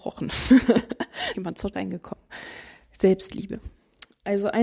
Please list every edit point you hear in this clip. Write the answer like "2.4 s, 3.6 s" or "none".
1.3 s, 1.7 s